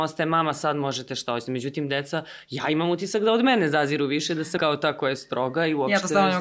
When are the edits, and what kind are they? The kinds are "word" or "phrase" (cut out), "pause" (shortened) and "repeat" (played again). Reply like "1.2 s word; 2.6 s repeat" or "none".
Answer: 4.6 s word